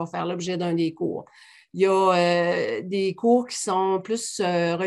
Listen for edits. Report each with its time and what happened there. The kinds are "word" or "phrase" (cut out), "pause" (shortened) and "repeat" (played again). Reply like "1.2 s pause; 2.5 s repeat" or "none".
none